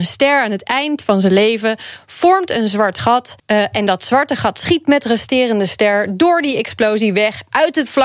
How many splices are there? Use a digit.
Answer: 1